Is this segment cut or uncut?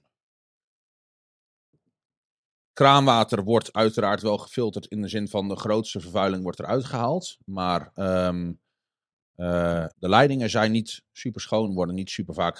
cut